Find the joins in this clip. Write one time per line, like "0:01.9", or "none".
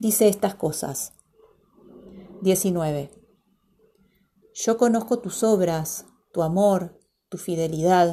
none